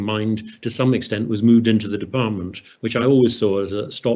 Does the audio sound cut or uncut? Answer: uncut